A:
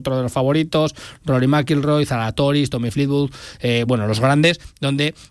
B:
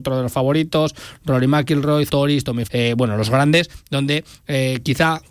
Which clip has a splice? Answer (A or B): B